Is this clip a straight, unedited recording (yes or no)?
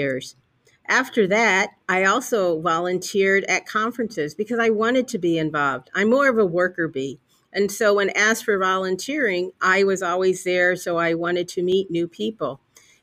no